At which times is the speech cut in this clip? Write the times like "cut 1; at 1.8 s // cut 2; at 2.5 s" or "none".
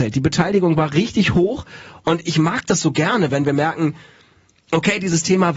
none